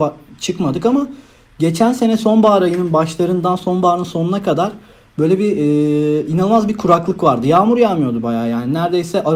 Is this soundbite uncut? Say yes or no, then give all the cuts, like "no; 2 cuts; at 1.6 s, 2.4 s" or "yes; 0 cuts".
yes; 0 cuts